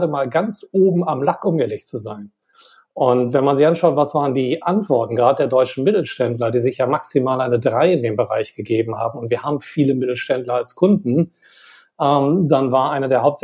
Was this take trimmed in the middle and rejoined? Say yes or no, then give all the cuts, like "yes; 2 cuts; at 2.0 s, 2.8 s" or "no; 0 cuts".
no; 0 cuts